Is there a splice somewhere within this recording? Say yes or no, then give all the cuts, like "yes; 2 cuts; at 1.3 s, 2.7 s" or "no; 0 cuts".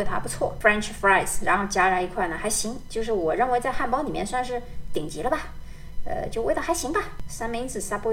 no; 0 cuts